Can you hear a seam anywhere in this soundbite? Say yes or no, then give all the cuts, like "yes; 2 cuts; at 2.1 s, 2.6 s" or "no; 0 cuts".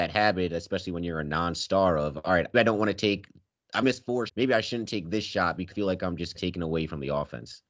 yes; 5 cuts; at 2.5 s, 3.8 s, 4.3 s, 5.7 s, 6.3 s